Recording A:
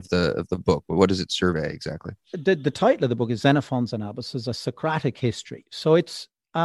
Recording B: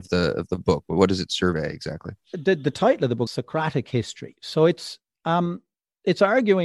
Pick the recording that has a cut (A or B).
B